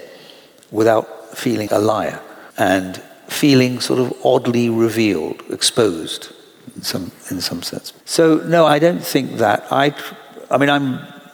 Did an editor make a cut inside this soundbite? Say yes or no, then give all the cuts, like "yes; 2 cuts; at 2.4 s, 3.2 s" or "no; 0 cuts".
yes; 4 cuts; at 1.7 s, 2.5 s, 8.0 s, 8.7 s